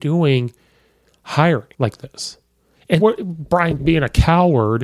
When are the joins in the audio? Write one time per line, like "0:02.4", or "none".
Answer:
0:01.7
0:03.0
0:03.8